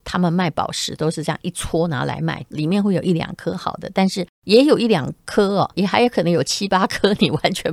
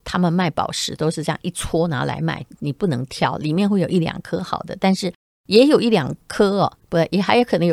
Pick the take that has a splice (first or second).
first